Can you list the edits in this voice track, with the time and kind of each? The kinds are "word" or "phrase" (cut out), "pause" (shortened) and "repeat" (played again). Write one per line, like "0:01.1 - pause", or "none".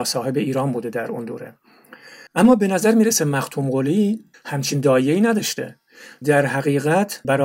0:02.3 - pause
0:06.2 - word